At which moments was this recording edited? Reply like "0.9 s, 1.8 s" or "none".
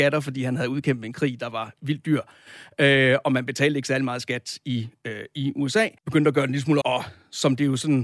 6.0 s, 6.8 s